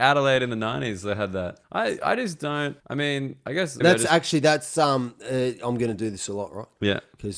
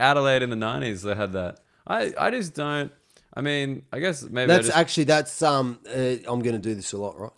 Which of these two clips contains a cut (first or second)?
first